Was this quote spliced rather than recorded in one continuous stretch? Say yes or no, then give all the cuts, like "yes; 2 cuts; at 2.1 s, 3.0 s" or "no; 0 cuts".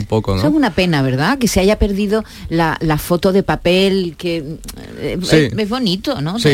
no; 0 cuts